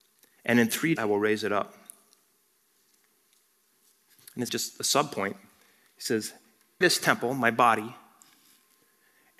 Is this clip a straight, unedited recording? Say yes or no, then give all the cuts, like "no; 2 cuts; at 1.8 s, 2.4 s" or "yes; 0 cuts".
no; 3 cuts; at 1.0 s, 4.5 s, 6.8 s